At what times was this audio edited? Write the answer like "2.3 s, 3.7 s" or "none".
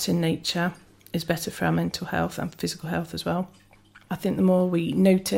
none